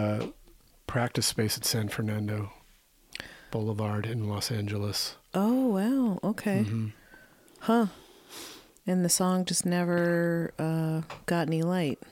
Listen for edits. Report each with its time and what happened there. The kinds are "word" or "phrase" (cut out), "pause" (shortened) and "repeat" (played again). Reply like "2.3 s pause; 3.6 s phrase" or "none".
none